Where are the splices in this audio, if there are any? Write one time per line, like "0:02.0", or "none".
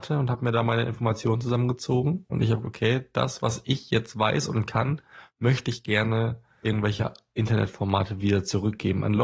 0:02.6
0:06.6